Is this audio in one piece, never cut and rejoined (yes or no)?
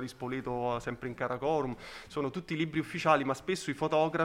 yes